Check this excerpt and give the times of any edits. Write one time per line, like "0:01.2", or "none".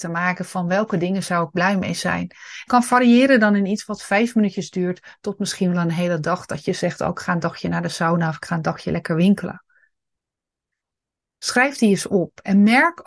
0:02.7